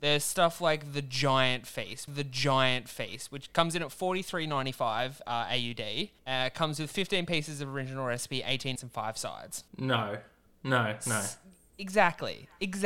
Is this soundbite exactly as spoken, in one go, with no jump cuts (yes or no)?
no